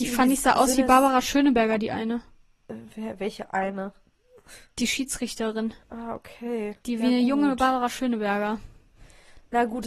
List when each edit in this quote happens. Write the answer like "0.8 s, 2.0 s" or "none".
5.8 s, 6.8 s